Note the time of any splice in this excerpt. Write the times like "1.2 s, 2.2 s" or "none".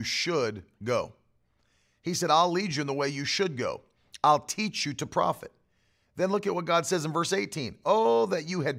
none